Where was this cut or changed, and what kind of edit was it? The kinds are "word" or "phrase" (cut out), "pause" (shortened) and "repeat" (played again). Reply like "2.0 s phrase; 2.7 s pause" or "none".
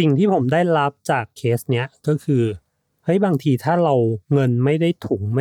none